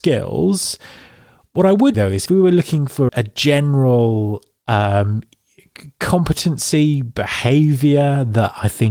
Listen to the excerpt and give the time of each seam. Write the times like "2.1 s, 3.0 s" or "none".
1.9 s, 2.3 s, 3.1 s